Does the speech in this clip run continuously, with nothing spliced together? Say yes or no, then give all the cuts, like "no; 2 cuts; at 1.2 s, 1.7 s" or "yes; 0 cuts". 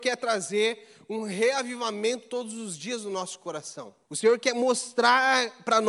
no; 1 cut; at 4.0 s